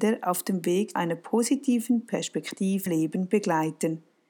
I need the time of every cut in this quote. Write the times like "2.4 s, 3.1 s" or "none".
1.0 s, 2.9 s